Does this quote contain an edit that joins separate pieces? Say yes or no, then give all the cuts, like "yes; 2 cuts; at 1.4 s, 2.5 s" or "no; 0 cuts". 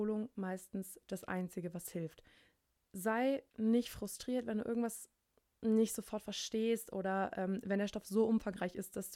yes; 1 cut; at 3.5 s